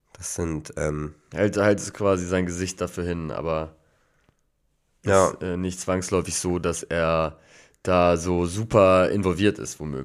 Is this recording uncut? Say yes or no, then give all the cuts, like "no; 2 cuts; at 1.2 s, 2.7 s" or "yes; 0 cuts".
yes; 0 cuts